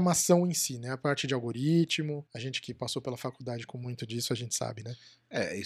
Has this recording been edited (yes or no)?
yes